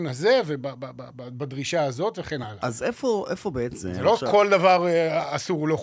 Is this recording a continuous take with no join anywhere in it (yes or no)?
yes